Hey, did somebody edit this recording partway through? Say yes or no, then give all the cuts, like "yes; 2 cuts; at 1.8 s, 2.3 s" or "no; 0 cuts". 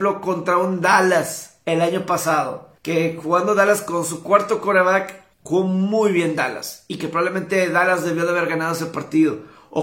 yes; 2 cuts; at 2.8 s, 5.3 s